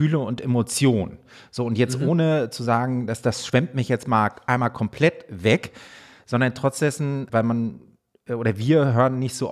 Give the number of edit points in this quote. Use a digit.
1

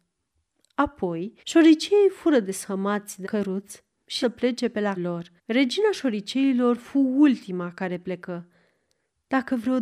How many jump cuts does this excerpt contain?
5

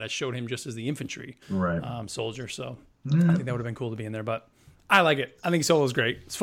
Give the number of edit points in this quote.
2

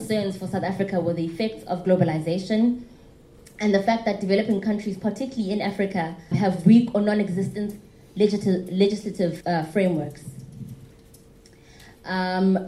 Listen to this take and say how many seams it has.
2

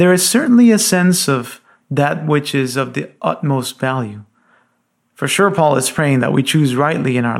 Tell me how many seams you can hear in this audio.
0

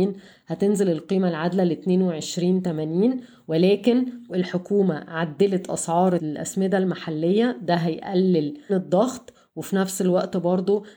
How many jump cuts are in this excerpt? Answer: 3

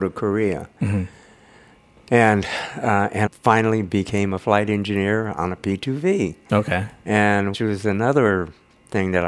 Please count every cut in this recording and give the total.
2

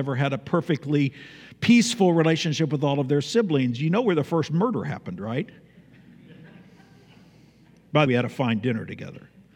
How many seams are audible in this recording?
1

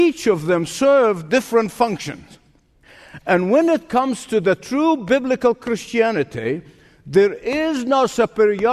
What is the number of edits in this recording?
0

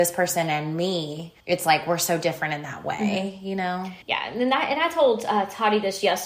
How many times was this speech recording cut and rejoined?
2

